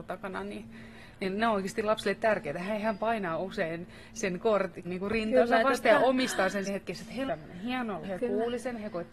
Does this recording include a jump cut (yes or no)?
yes